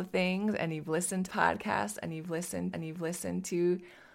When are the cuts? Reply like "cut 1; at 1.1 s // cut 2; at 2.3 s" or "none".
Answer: cut 1; at 1.3 s // cut 2; at 2.7 s